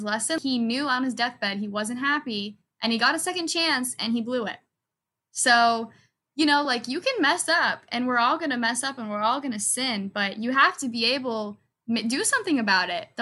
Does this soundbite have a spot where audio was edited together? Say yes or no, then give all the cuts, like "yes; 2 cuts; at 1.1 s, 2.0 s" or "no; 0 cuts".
no; 0 cuts